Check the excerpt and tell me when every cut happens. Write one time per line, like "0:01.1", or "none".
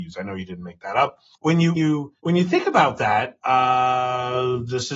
0:01.3
0:01.8
0:02.2